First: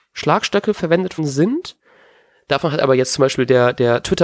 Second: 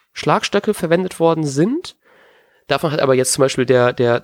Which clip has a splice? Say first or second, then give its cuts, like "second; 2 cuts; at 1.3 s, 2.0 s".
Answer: first; 1 cut; at 1.2 s